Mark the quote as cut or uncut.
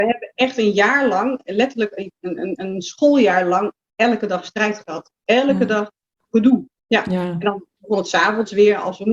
cut